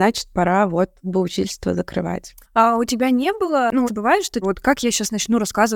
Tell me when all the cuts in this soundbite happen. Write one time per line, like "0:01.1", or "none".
0:01.0
0:02.4
0:03.8
0:04.4